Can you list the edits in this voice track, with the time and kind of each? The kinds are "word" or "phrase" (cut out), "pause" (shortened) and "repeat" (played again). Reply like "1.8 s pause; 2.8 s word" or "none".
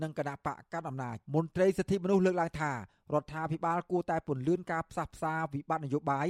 1.2 s pause